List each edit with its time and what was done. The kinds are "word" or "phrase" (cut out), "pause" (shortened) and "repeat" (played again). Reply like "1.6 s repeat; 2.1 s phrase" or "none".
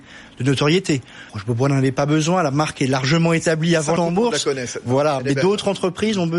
1.3 s pause; 4.0 s word